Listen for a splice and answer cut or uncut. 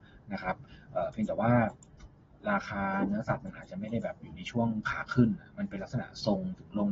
uncut